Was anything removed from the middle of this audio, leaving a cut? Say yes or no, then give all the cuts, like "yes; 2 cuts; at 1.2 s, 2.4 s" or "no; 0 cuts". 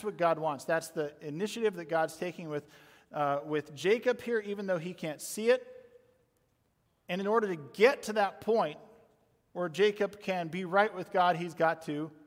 no; 0 cuts